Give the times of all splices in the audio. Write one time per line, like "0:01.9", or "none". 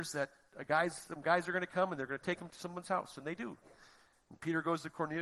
none